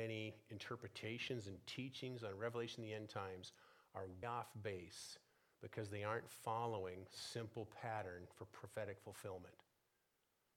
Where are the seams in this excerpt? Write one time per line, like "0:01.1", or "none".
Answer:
0:04.2

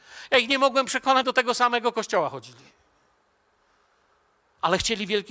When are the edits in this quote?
0:01.2

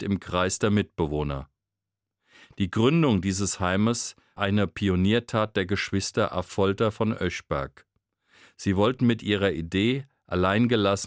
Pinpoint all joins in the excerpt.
0:04.4

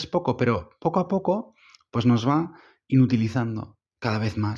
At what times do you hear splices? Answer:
none

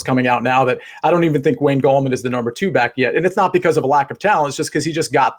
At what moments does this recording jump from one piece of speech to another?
none

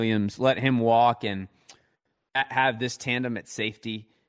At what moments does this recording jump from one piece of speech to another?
none

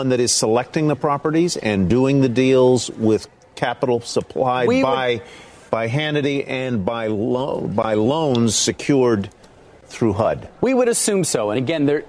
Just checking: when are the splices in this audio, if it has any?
none

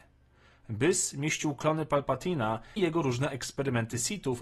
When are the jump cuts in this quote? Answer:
0:02.8
0:03.3

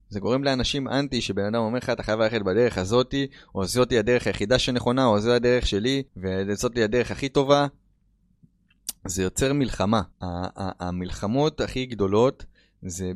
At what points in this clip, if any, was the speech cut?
0:06.1
0:10.1

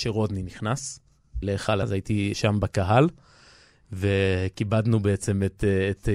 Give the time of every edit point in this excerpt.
0:01.4
0:01.8
0:02.3

